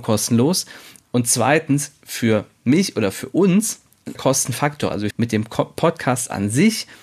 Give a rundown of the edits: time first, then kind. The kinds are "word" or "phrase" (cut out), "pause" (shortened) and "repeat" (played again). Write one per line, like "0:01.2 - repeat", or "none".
0:04.2 - word
0:05.1 - word